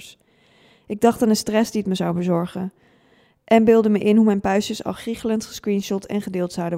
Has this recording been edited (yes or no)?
no